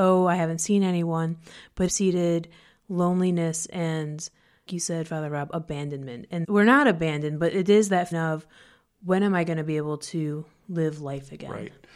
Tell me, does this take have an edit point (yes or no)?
yes